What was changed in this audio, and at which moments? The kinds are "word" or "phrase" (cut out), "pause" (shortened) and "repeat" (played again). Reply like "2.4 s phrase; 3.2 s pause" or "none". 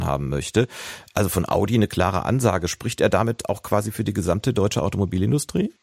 none